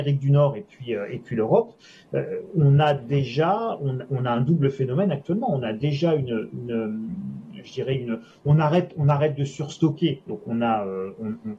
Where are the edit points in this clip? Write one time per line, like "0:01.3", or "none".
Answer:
none